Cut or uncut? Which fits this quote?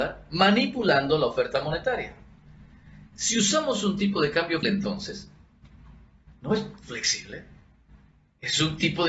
cut